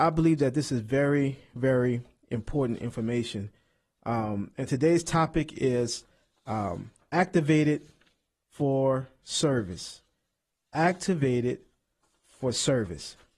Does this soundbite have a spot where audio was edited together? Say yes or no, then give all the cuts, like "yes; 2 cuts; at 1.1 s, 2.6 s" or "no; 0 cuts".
no; 0 cuts